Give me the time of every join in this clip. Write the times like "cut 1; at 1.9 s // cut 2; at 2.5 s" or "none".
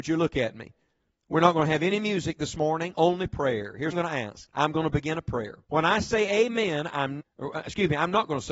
cut 1; at 3.9 s // cut 2; at 4.5 s // cut 3; at 5.6 s // cut 4; at 7.2 s